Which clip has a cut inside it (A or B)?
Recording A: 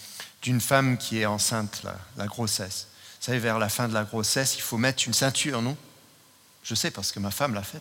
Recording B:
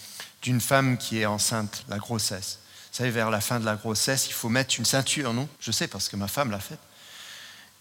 B